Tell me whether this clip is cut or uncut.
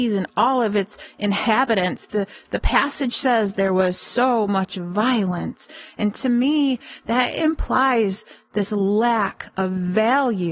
uncut